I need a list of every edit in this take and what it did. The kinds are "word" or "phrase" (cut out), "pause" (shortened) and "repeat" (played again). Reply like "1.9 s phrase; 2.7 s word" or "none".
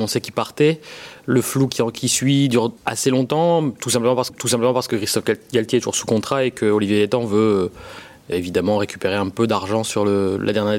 2.8 s pause; 4.3 s repeat; 8.3 s word